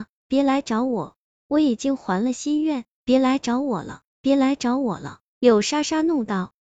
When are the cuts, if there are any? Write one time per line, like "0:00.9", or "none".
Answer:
none

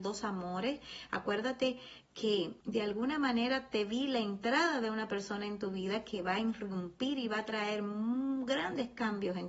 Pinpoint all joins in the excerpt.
0:02.6

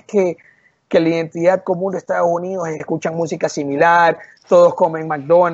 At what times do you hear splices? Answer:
0:02.8

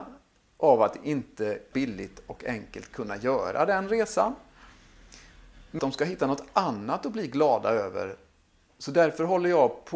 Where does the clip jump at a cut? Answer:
0:01.7
0:05.8

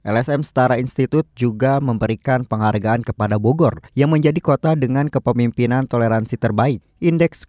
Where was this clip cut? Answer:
0:03.9

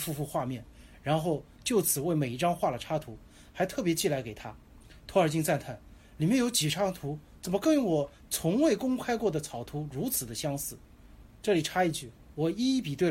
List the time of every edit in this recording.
none

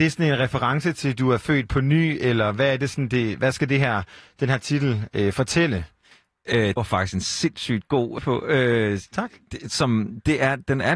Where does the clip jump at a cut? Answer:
0:06.8
0:08.2

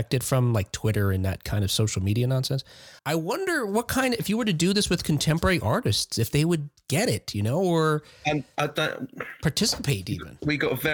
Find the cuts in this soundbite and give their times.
0:03.0
0:06.8

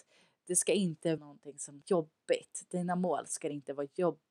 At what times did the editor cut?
0:01.2
0:01.8

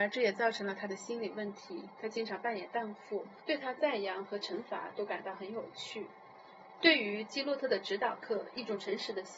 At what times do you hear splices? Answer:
0:03.4

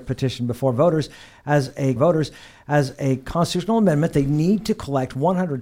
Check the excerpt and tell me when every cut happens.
0:02.0

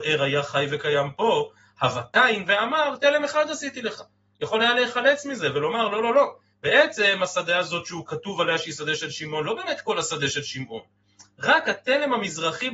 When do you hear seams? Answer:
none

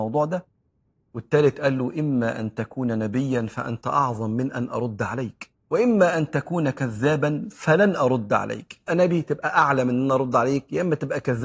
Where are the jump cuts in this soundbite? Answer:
0:05.6
0:08.9

